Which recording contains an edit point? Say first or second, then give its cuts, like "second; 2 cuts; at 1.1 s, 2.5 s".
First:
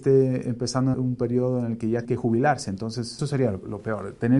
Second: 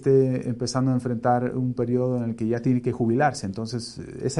first; 3 cuts; at 0.9 s, 2.0 s, 3.2 s